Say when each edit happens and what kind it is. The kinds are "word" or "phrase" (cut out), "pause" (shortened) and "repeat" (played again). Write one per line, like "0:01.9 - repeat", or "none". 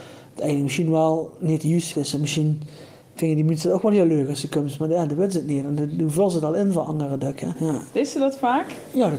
0:01.9 - word